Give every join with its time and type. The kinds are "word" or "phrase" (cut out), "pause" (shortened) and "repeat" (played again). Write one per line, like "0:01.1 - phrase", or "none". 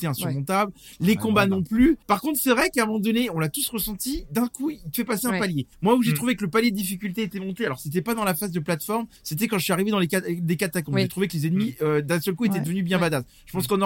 0:02.0 - pause
0:05.7 - pause
0:09.2 - pause